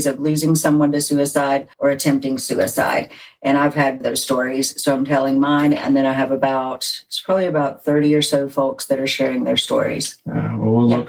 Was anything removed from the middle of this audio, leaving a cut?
yes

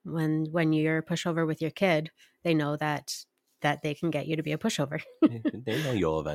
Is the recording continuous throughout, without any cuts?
yes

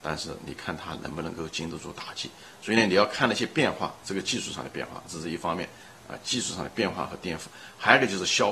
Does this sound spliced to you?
yes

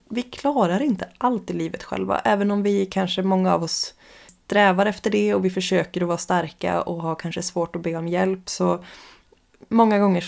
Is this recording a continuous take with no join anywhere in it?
yes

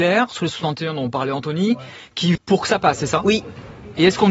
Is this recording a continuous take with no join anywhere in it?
no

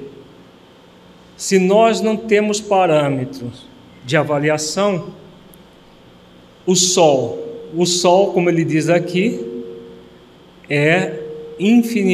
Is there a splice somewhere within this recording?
no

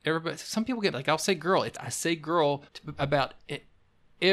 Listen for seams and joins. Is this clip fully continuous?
no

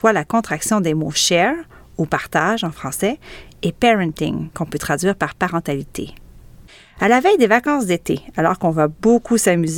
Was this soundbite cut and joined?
no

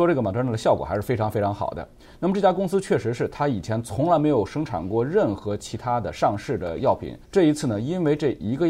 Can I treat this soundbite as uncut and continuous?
no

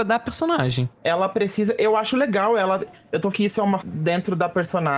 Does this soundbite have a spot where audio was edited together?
yes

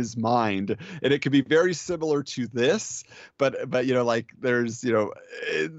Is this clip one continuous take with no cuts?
yes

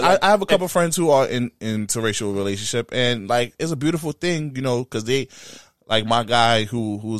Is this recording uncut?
yes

